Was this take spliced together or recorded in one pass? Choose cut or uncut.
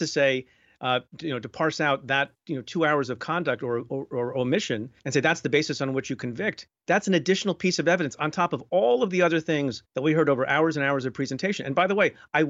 cut